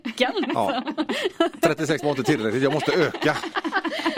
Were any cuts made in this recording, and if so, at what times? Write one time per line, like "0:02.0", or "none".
0:02.0